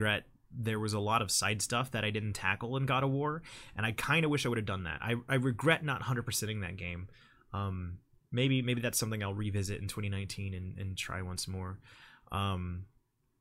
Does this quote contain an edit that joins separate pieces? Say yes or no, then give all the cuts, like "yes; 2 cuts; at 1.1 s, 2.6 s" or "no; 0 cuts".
no; 0 cuts